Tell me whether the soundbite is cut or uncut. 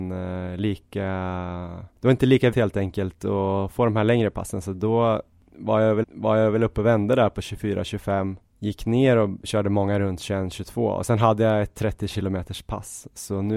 cut